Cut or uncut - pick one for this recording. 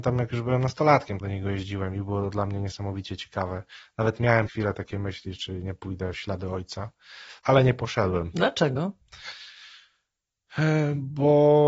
cut